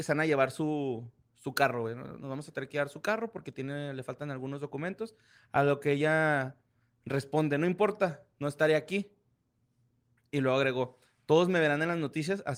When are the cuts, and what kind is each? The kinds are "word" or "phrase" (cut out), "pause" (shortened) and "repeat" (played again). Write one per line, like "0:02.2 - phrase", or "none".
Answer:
none